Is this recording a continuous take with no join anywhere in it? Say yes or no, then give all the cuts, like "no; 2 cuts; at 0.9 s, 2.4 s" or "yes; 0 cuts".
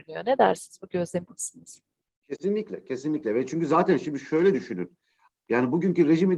no; 1 cut; at 1.3 s